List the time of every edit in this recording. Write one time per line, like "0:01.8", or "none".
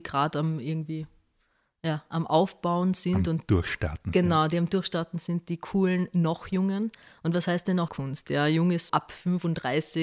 0:07.9
0:08.9